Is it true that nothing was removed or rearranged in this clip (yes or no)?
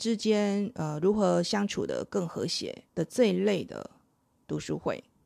no